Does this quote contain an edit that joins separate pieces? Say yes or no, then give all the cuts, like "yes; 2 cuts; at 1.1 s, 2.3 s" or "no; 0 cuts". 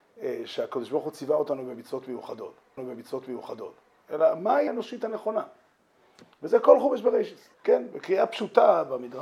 yes; 4 cuts; at 2.8 s, 4.7 s, 6.3 s, 7.5 s